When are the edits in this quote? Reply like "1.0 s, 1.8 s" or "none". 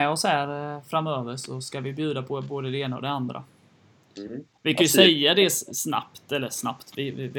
none